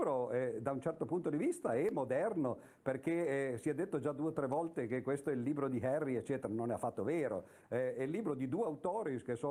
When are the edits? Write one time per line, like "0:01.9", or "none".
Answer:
none